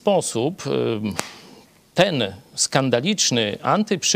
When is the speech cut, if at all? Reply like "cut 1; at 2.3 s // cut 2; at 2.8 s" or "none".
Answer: none